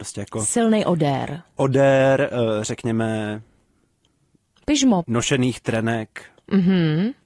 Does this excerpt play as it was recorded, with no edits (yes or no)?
yes